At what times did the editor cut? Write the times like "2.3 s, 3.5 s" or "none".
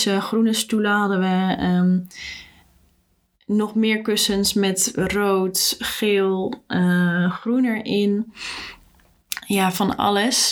none